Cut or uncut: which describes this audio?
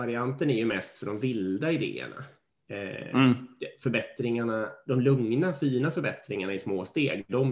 uncut